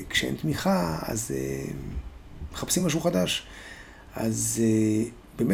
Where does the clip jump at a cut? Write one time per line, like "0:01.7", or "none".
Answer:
none

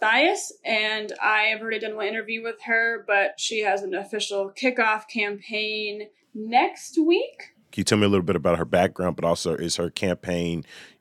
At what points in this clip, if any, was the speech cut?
none

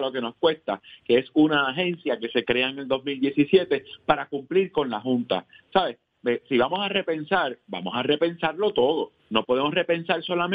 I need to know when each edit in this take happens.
0:09.2

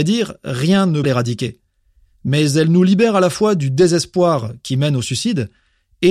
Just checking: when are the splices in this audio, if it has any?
0:01.0

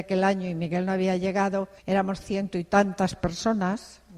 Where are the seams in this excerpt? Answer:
0:01.8

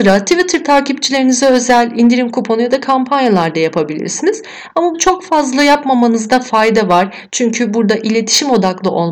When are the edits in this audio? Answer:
0:04.9

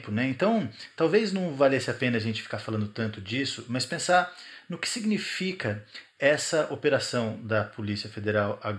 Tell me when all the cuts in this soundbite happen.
none

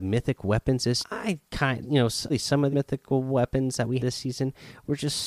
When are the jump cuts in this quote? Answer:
0:01.0
0:01.8
0:02.3
0:02.7
0:04.0

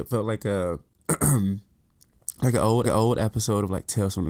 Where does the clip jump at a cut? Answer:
0:02.8

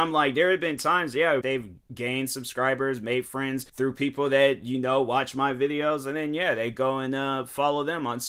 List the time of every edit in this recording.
0:01.4
0:03.7

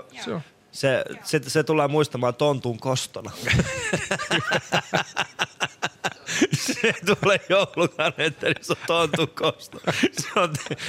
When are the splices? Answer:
none

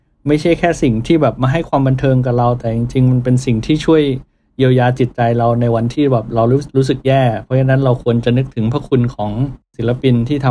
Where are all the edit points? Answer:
none

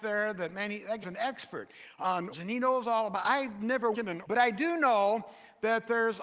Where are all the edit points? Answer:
0:01.0
0:02.3
0:03.9
0:04.2

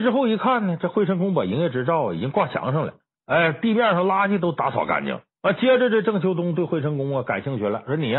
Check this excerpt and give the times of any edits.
0:03.1
0:05.3

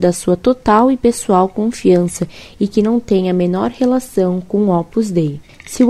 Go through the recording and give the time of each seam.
none

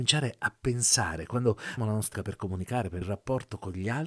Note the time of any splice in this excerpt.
0:01.8
0:02.1
0:03.0

